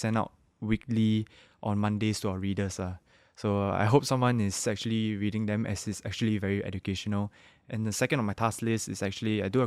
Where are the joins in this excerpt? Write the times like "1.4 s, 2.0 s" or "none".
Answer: none